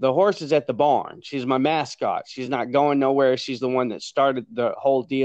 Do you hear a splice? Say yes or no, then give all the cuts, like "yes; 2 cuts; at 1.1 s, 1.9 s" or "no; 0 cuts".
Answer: no; 0 cuts